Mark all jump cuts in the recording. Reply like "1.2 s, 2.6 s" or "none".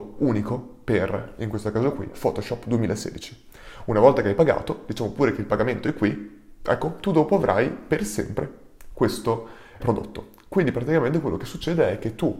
9.8 s